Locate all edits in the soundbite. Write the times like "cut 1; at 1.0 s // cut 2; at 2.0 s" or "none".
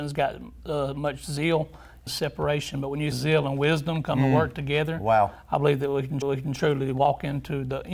cut 1; at 2.1 s // cut 2; at 3.1 s // cut 3; at 6.2 s